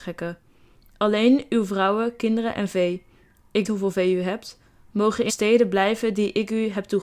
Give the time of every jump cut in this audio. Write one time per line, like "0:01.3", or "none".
0:03.6
0:05.3